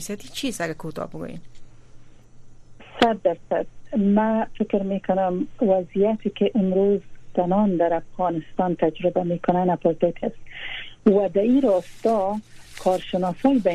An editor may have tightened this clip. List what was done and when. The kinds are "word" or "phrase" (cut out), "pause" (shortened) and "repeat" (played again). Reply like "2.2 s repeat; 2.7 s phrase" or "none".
10.2 s word